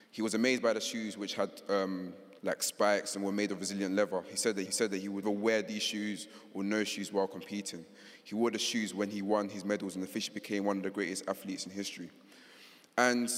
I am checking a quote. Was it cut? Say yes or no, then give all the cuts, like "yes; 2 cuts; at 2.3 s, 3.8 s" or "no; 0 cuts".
yes; 3 cuts; at 2.4 s, 4.7 s, 5.2 s